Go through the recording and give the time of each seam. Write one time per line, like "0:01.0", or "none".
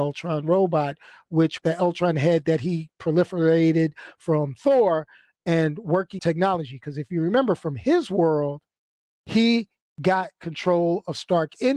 0:01.6
0:06.2